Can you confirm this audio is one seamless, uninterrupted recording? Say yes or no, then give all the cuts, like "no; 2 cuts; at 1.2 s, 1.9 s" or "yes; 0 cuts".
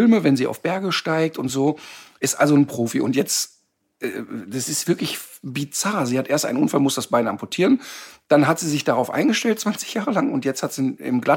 yes; 0 cuts